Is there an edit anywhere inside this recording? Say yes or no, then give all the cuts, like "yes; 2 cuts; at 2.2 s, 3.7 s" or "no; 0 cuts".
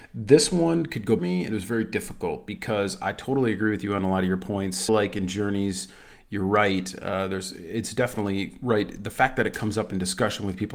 yes; 2 cuts; at 1.2 s, 4.9 s